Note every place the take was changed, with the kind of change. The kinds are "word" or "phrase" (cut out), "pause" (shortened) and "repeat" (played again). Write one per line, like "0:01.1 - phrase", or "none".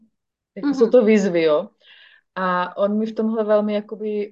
none

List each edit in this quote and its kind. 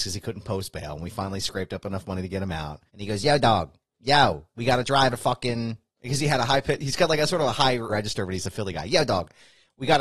0:02.9 - pause
0:03.8 - pause
0:05.1 - word
0:07.9 - word

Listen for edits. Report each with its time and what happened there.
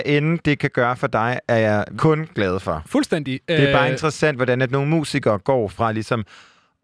0:02.0 - word

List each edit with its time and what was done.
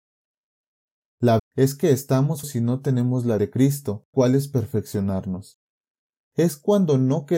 0:01.4 - word
0:02.4 - word
0:03.4 - word
0:04.1 - word

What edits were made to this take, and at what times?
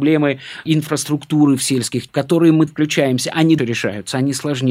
0:02.1 - word
0:02.7 - word
0:03.6 - word

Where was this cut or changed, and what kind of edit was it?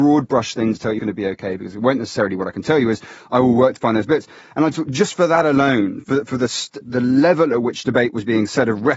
0:01.0 - word
0:06.8 - word

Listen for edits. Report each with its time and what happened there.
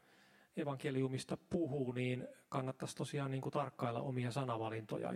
none

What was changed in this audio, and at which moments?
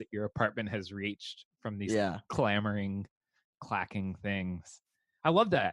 none

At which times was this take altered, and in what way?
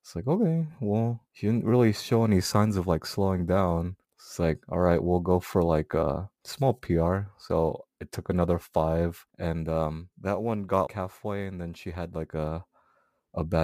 0:01.3 - pause
0:04.0 - pause
0:06.3 - pause
0:09.3 - pause
0:10.1 - pause
0:10.9 - word

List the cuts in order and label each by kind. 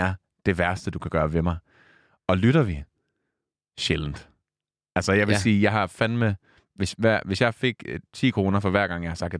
none

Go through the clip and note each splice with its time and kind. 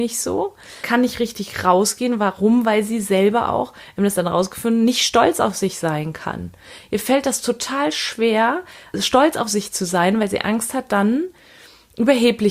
none

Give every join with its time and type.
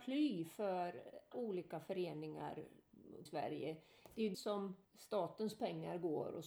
0:01.3 - word
0:03.3 - phrase
0:04.3 - word
0:04.8 - pause

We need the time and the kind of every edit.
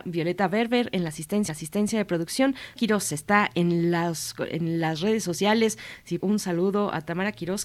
0:01.5 - repeat
0:02.8 - word
0:06.2 - phrase

